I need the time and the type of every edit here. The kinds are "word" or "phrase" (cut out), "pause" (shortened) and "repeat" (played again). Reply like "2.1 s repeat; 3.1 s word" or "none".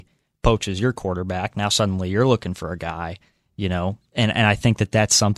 none